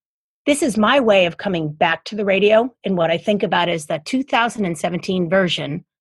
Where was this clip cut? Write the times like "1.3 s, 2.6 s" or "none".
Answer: none